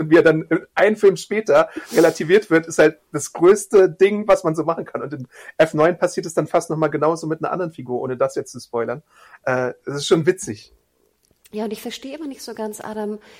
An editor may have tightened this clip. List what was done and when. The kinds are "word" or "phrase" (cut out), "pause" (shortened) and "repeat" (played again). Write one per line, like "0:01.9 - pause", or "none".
none